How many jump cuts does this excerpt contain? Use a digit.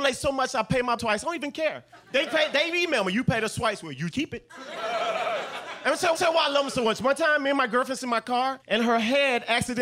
7